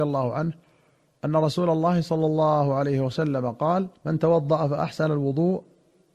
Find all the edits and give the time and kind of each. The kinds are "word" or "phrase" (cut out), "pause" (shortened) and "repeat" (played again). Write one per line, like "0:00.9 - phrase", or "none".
0:04.0 - pause